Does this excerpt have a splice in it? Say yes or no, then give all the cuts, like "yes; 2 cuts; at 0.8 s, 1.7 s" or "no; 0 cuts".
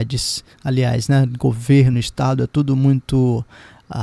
no; 0 cuts